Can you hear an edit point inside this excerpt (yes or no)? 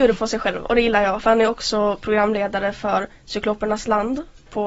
no